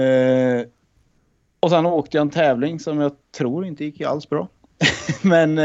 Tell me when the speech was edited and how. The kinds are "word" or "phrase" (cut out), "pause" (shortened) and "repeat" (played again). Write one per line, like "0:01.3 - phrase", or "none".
none